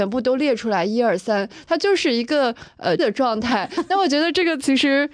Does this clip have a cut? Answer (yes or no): yes